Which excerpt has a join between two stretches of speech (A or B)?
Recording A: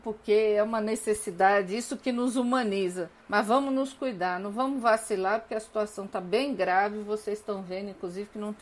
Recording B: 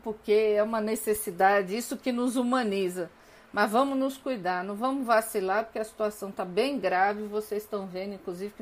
A